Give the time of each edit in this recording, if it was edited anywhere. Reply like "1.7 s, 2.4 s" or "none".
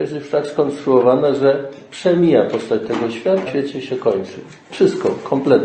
3.5 s